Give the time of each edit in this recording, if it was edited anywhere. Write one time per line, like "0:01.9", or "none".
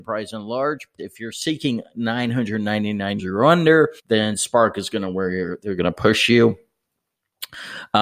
0:01.0
0:03.2
0:04.0